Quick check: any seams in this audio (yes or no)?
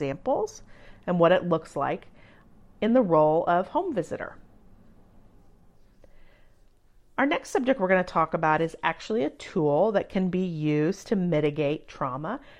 no